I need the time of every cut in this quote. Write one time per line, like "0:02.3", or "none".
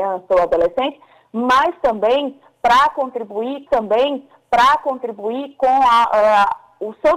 0:03.7